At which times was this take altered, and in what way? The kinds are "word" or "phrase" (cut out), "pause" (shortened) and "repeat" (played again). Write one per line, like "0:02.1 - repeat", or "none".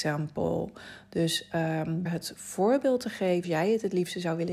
0:02.1 - word
0:03.4 - word